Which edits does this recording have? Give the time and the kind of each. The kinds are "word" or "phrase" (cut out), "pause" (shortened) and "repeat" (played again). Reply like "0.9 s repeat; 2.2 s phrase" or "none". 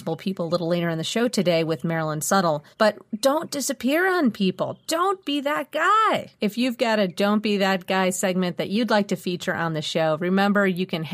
2.7 s pause; 6.4 s pause

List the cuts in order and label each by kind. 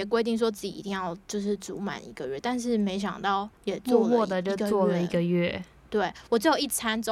3.6 s pause

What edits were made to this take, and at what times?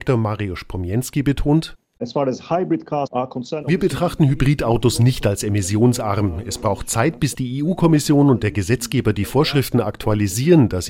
none

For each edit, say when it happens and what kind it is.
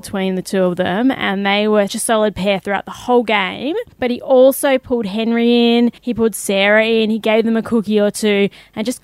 1.9 s word; 3.9 s pause; 6.0 s pause

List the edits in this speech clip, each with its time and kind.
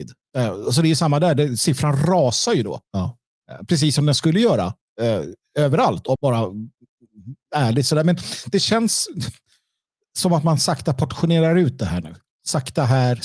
2.8 s pause; 6.2 s word

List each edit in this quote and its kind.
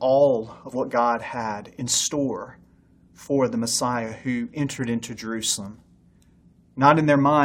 none

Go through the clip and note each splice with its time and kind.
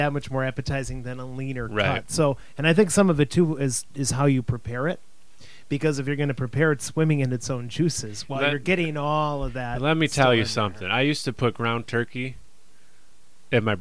none

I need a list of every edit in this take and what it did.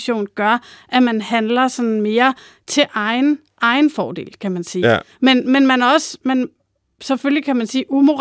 none

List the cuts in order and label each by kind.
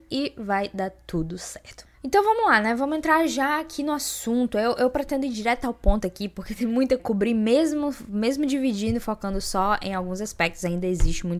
1.9 s pause; 7.0 s phrase

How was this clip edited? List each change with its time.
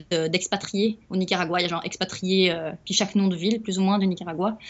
none

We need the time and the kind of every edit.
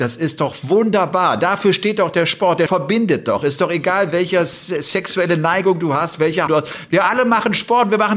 2.7 s word; 6.5 s word

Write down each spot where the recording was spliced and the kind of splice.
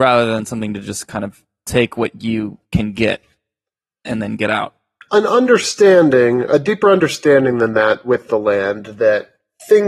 none

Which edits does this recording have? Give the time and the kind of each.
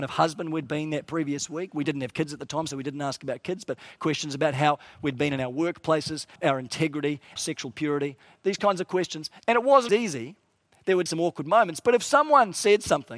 6.4 s word; 7.4 s word; 9.9 s word; 11.1 s word

